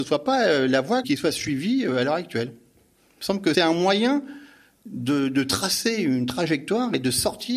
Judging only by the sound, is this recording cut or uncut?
cut